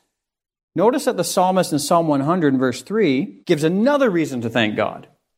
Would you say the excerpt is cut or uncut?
cut